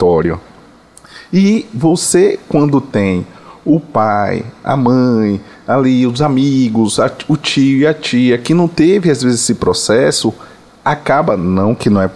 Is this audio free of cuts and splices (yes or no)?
yes